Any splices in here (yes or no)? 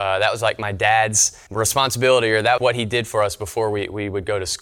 yes